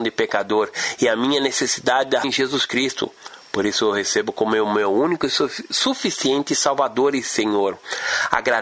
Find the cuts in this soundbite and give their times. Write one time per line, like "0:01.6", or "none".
0:02.2